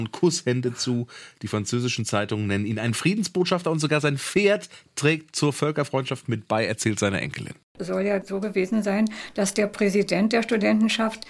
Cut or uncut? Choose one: uncut